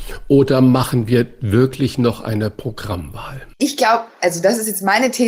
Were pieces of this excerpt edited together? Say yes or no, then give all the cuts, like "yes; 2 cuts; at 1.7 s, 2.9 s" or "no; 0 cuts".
no; 0 cuts